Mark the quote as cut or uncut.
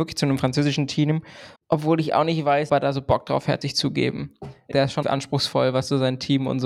cut